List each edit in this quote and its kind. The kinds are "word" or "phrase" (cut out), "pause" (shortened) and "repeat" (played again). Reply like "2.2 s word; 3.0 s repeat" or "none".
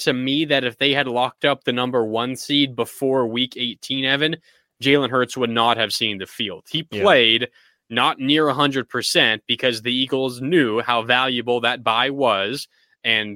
none